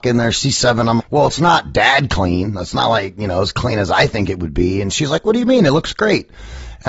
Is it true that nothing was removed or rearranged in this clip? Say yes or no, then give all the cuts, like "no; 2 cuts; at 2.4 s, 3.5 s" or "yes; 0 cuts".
no; 1 cut; at 1.0 s